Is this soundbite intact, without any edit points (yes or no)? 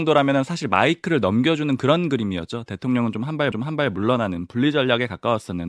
no